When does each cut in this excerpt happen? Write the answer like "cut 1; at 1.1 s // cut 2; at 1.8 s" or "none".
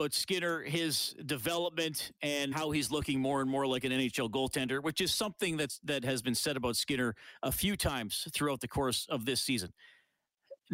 cut 1; at 2.5 s